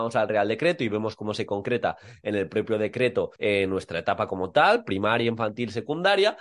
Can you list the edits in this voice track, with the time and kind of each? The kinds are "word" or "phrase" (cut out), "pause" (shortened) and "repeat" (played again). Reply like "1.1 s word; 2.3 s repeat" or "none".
3.4 s pause